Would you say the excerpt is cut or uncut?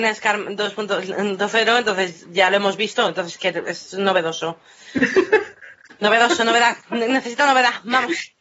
uncut